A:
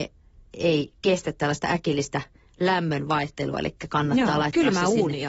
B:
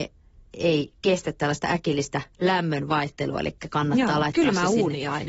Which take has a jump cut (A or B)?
B